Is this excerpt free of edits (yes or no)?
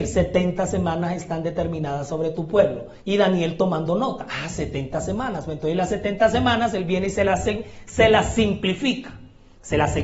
no